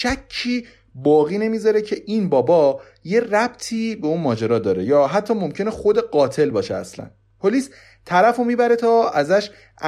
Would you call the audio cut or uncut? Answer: uncut